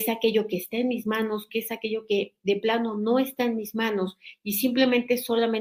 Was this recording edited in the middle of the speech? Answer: no; 0 cuts

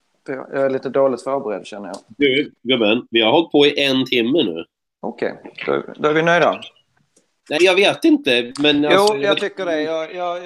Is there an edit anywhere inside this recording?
yes; 1 cut; at 7.6 s

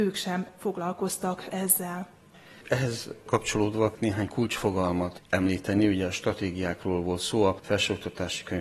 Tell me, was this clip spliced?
yes; 1 cut; at 4.0 s

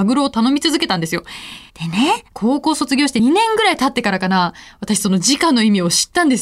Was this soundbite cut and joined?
yes; 2 cuts; at 1.7 s, 2.3 s

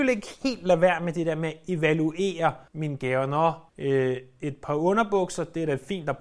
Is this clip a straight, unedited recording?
no; 2 cuts; at 2.7 s, 3.7 s

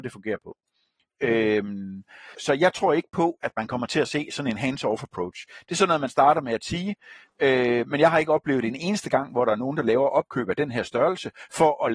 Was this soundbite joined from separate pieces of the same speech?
yes; 1 cut; at 2.3 s

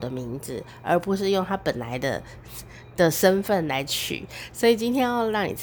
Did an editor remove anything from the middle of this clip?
no; 0 cuts

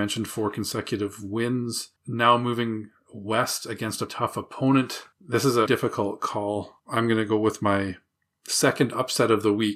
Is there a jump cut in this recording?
yes; 5 cuts; at 2.0 s, 4.1 s, 5.1 s, 5.7 s, 6.8 s

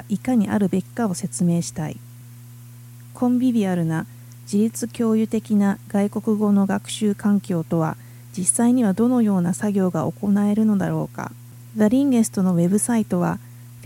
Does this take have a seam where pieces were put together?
no; 0 cuts

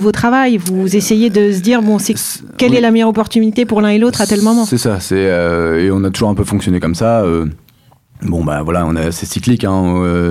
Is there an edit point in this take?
no; 0 cuts

